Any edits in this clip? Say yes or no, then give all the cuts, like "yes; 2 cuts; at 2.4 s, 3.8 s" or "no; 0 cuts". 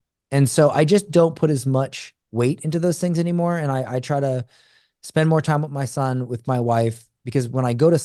no; 0 cuts